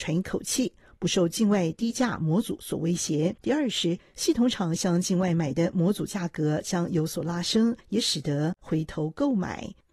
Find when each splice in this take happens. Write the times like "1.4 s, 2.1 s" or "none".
3.4 s, 7.8 s